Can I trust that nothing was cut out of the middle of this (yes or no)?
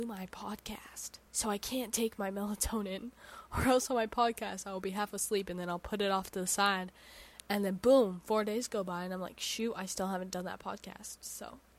no